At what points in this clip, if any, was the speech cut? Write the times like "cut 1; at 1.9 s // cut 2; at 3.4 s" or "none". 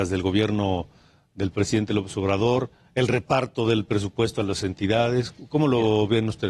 none